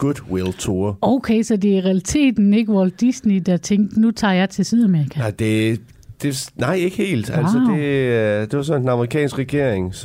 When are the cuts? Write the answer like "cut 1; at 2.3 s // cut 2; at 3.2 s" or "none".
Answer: none

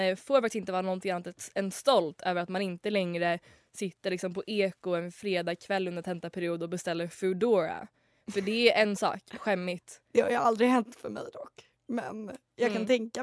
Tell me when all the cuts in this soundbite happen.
cut 1; at 10.0 s

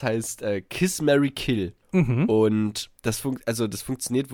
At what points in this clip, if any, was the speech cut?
cut 1; at 1.8 s // cut 2; at 3.0 s

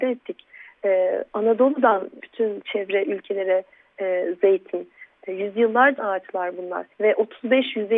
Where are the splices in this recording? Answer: cut 1; at 2.2 s // cut 2; at 2.6 s // cut 3; at 6.0 s // cut 4; at 6.9 s

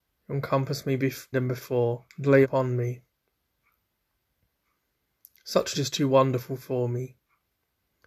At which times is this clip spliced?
cut 1; at 1.3 s // cut 2; at 2.1 s // cut 3; at 2.4 s // cut 4; at 5.7 s

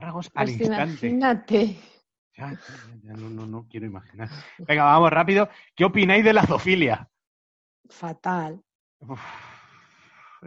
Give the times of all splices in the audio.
none

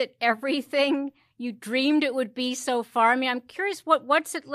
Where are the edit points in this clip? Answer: none

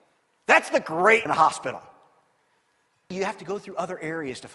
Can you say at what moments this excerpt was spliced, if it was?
cut 1; at 1.3 s // cut 2; at 3.1 s

